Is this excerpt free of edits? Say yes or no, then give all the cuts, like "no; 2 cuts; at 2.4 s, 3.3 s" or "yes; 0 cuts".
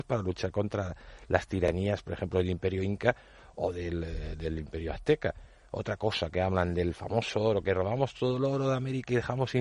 yes; 0 cuts